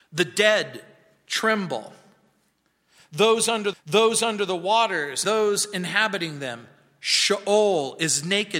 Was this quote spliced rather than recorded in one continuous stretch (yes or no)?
yes